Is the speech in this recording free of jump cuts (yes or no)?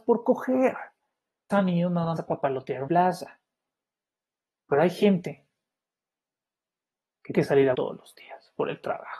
no